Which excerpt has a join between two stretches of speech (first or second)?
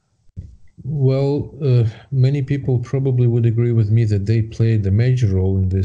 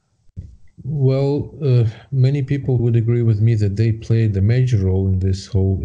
second